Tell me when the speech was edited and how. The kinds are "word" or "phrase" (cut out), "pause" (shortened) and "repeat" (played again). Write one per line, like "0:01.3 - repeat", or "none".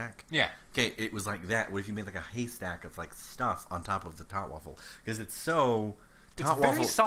none